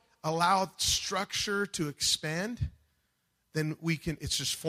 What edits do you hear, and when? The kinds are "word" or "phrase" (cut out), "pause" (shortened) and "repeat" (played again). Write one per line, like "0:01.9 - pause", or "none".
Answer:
none